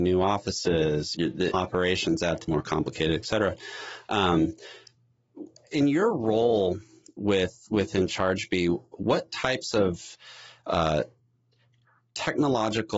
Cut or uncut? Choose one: cut